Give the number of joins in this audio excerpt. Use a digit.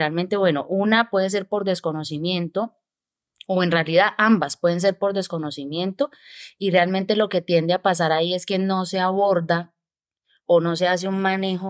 0